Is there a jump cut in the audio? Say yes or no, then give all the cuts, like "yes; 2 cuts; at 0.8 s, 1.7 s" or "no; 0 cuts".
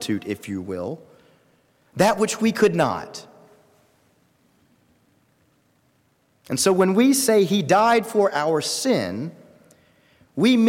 no; 0 cuts